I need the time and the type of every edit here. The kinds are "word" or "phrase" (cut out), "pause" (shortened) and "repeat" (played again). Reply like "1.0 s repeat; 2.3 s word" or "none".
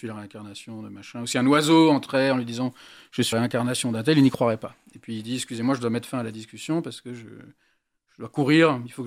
3.3 s word